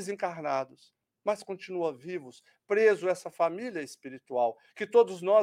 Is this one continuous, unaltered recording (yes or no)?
yes